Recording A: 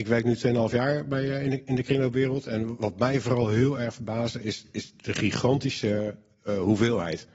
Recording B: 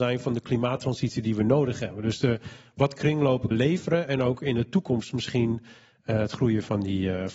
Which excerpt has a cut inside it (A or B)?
B